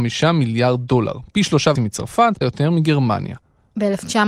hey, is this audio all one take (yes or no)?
no